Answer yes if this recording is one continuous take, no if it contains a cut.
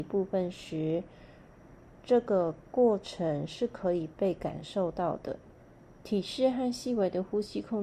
no